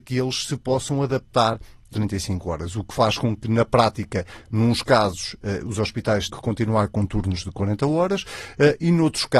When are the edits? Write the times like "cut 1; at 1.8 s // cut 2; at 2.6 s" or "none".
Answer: cut 1; at 1.9 s // cut 2; at 6.3 s